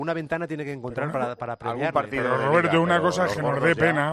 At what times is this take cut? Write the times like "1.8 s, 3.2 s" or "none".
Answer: none

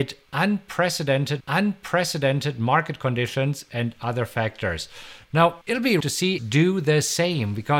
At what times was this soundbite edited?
1.4 s, 5.6 s, 6.0 s, 6.4 s

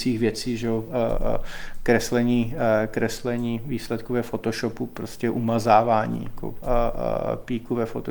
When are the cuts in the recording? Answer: none

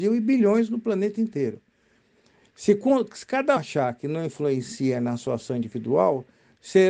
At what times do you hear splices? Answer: 3.6 s

